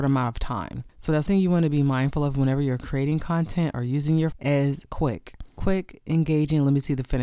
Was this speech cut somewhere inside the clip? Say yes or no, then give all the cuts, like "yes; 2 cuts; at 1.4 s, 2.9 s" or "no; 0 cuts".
yes; 2 cuts; at 1.3 s, 4.3 s